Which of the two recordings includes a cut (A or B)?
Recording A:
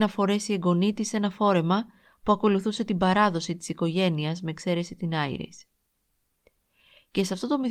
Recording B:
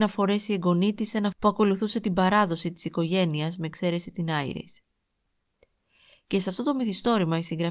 B